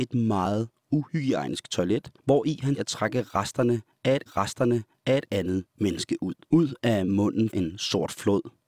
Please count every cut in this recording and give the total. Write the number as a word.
five